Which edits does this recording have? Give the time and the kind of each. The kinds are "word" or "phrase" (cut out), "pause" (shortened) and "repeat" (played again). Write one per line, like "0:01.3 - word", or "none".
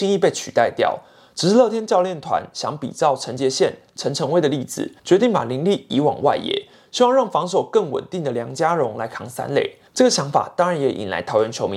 0:05.0 - pause
0:09.9 - pause